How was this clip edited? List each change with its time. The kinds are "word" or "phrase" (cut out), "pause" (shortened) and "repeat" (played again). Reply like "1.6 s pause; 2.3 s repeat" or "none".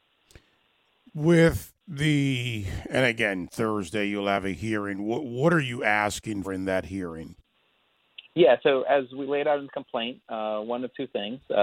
6.4 s word